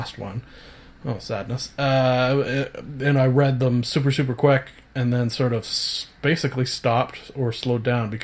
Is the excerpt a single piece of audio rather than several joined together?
yes; 0 cuts

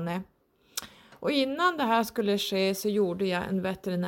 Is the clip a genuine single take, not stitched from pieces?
yes; 0 cuts

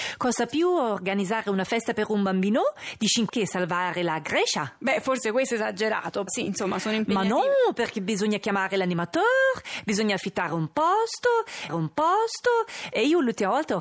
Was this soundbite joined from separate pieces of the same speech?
yes; 3 cuts; at 3.3 s, 6.3 s, 11.7 s

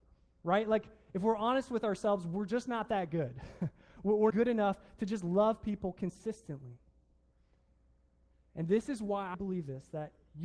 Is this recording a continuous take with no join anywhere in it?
no; 2 cuts; at 4.3 s, 9.3 s

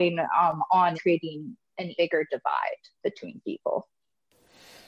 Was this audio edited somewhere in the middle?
yes; 3 cuts; at 0.9 s, 1.9 s, 3.0 s

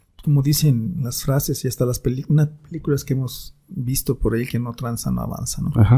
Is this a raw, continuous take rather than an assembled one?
yes; 0 cuts

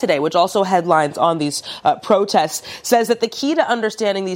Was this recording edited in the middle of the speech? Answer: no; 0 cuts

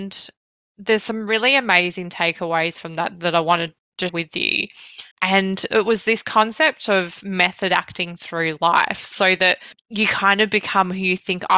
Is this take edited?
yes; 2 cuts; at 4.1 s, 5.1 s

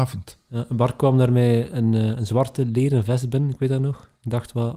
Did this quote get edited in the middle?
no; 0 cuts

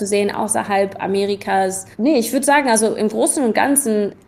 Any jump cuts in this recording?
yes; 1 cut; at 1.9 s

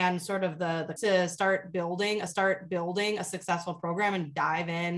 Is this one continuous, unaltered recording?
no; 2 cuts; at 1.0 s, 2.3 s

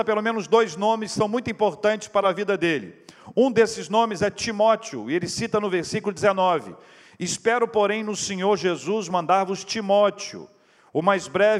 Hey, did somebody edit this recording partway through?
no; 0 cuts

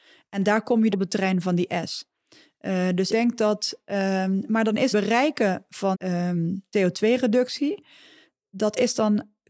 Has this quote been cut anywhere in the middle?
yes; 6 cuts; at 0.9 s, 3.1 s, 4.5 s, 4.9 s, 5.9 s, 6.7 s

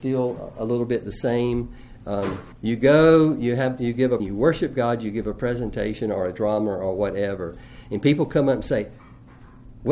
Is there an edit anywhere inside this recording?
yes; 2 cuts; at 2.5 s, 4.2 s

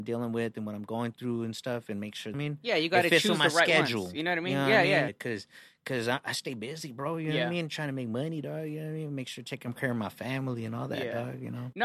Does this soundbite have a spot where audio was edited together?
yes; 2 cuts; at 2.3 s, 5.1 s

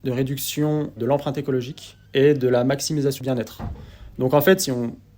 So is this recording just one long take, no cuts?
no; 3 cuts; at 1.0 s, 2.1 s, 3.2 s

